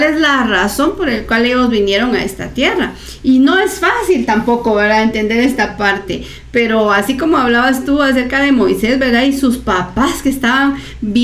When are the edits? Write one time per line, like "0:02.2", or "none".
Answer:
none